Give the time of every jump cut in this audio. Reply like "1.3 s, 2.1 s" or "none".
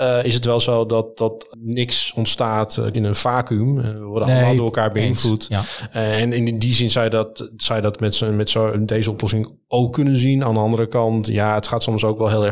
1.5 s, 2.9 s